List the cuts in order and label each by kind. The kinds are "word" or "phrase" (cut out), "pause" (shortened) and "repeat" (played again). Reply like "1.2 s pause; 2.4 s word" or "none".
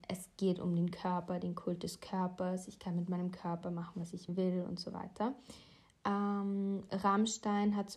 none